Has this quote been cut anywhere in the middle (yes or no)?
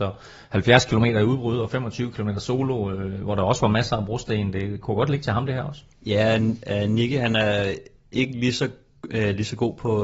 yes